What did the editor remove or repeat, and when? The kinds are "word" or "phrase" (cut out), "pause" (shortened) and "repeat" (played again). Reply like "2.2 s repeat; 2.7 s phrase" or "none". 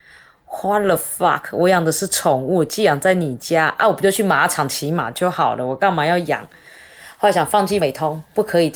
7.8 s phrase